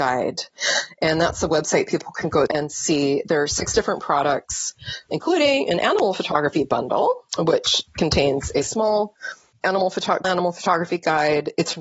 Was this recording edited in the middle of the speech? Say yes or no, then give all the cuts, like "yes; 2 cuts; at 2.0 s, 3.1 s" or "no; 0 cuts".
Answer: yes; 5 cuts; at 2.5 s, 5.1 s, 7.3 s, 9.5 s, 10.2 s